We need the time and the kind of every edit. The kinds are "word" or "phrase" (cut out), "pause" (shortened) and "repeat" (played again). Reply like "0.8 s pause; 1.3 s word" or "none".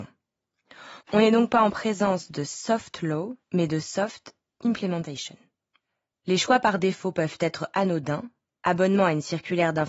1.0 s pause; 3.4 s pause

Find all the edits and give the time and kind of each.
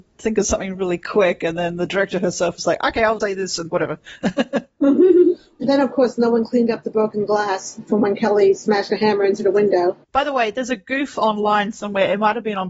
3.2 s word; 3.7 s word; 5.6 s word; 10.0 s pause

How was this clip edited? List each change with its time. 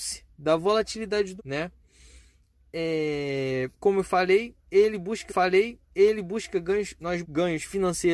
1.4 s word; 3.7 s pause; 5.3 s repeat; 7.2 s word

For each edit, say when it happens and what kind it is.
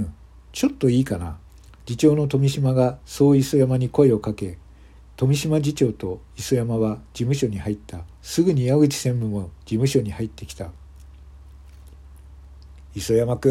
1.5 s pause; 3.0 s pause; 8.1 s pause; 9.6 s pause

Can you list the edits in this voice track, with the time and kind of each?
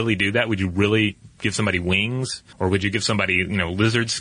2.5 s pause

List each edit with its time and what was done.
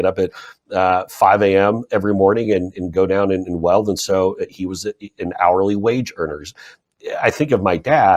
none

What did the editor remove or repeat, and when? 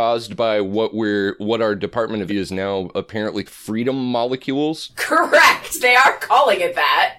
2.3 s word; 3.5 s word

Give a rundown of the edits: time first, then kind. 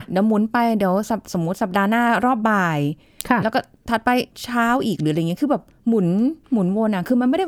4.3 s pause; 6.4 s pause

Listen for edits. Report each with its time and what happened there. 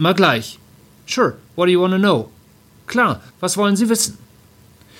1.5 s pause; 3.3 s pause

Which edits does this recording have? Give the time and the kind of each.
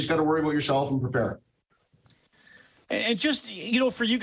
none

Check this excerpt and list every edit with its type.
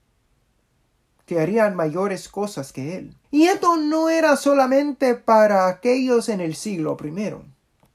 3.2 s pause

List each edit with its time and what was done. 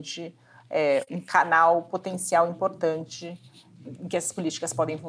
none

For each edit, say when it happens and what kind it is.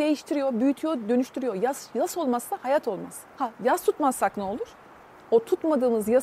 3.3 s pause; 5.1 s pause

